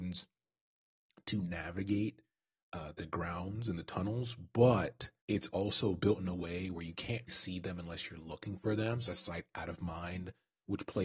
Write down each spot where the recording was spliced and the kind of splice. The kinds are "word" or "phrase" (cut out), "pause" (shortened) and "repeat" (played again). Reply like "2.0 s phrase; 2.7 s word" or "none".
5.2 s pause; 7.3 s word; 9.1 s phrase